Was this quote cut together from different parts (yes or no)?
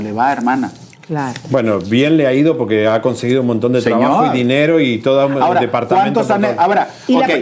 no